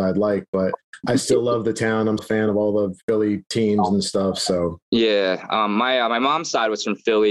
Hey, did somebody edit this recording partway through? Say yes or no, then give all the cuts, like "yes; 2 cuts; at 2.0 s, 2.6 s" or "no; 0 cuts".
yes; 2 cuts; at 2.2 s, 4.8 s